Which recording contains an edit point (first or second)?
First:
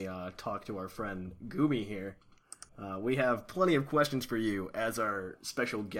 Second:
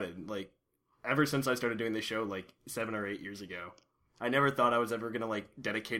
first